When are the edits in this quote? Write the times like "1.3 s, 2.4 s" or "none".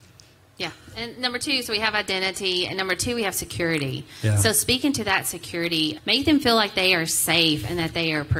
6.0 s